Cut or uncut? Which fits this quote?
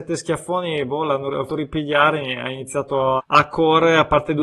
cut